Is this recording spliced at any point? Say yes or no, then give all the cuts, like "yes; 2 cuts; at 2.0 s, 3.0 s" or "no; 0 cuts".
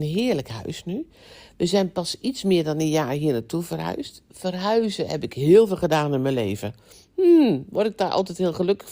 no; 0 cuts